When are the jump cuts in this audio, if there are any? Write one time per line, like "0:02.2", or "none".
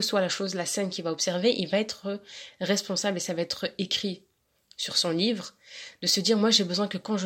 none